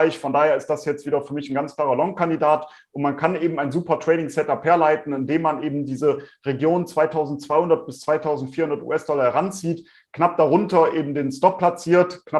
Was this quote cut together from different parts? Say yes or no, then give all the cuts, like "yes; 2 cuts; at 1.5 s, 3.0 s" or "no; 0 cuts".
no; 0 cuts